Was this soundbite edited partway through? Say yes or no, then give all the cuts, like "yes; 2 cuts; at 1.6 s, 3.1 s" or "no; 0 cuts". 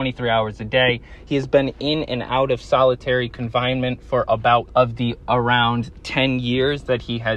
yes; 1 cut; at 4.7 s